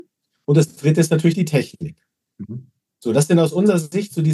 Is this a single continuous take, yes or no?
yes